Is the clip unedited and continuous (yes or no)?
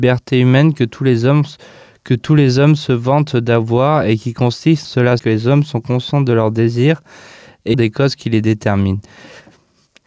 no